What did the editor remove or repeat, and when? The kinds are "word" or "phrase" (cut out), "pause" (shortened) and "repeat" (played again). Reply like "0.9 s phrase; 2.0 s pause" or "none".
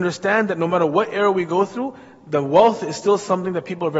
none